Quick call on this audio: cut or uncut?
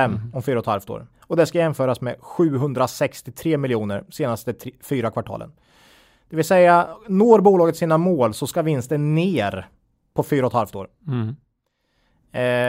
cut